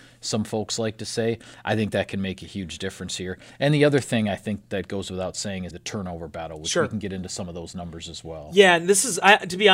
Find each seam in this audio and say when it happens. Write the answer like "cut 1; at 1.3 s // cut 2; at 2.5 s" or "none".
cut 1; at 4.6 s // cut 2; at 5.7 s